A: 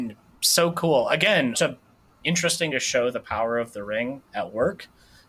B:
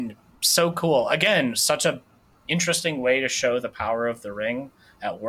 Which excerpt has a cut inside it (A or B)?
A